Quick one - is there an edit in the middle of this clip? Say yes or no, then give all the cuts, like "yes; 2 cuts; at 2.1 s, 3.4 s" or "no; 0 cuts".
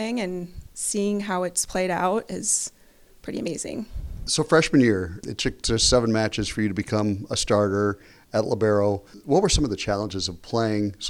no; 0 cuts